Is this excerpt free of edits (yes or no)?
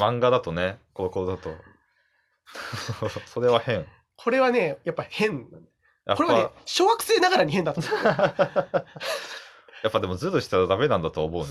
yes